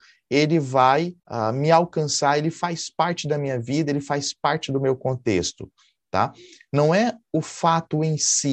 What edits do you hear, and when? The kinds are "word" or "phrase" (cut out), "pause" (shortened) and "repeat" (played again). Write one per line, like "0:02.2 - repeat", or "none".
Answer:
0:01.2 - pause